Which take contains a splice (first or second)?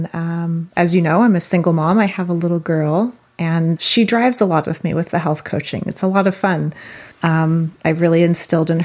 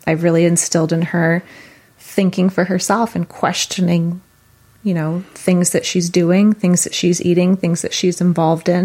first